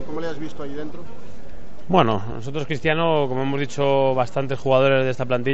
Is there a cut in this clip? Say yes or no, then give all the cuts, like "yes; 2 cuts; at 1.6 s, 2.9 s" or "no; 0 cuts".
no; 0 cuts